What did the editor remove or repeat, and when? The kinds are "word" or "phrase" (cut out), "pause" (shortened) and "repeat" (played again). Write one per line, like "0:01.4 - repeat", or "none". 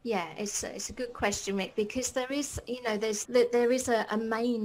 0:03.2 - word